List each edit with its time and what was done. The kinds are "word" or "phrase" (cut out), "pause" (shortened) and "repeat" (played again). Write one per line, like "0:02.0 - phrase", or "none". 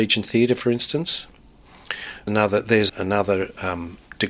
0:02.3 - word
0:02.9 - word

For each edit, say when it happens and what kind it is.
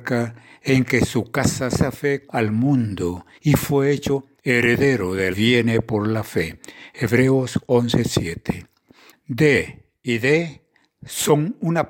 0:01.7 - phrase
0:02.3 - word
0:03.3 - pause
0:04.4 - pause
0:05.3 - phrase

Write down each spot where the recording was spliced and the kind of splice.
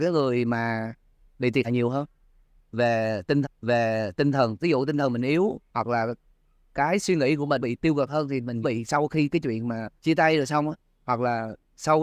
0:01.6 - word
0:03.4 - repeat
0:05.7 - pause
0:07.6 - word
0:08.6 - word
0:10.0 - pause

